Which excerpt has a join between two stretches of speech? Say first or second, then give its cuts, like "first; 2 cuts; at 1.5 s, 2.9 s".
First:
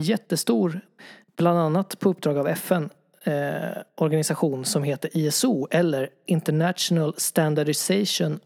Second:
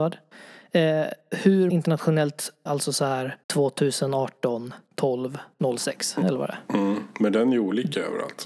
second; 3 cuts; at 1.7 s, 2.7 s, 3.4 s